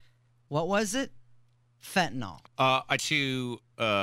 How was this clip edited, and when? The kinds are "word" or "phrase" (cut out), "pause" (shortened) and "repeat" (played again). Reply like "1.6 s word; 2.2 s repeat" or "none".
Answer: 2.5 s pause; 3.0 s word